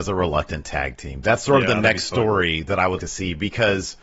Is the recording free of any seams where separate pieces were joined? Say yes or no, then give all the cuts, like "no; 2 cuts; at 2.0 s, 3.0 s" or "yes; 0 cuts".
no; 1 cut; at 3.0 s